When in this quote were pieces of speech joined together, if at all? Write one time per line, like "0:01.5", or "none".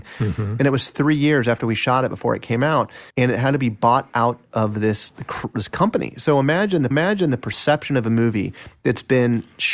0:03.1
0:06.9